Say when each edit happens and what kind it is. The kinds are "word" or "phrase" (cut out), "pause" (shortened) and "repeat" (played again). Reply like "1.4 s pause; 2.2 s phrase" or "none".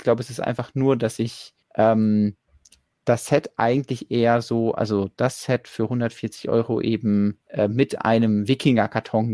1.6 s pause; 7.4 s pause